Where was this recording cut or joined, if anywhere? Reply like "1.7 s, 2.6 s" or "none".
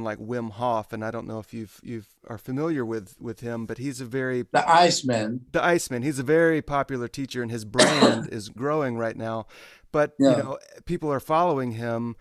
2.2 s, 8.6 s